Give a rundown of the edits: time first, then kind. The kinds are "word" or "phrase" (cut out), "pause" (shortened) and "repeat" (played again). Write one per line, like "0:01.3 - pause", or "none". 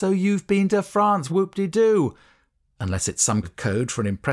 0:01.3 - word
0:03.4 - word